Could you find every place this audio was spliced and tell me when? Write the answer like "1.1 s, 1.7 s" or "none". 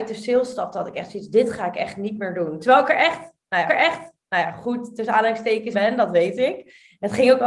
3.7 s, 5.7 s